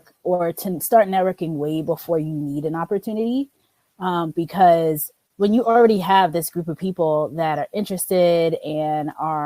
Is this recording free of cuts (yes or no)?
no